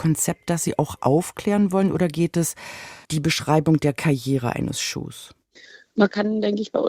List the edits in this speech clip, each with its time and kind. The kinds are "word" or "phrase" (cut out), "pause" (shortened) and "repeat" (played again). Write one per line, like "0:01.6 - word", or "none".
0:03.0 - word